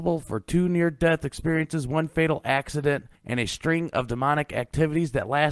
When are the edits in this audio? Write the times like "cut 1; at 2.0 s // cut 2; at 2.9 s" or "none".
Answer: cut 1; at 3.2 s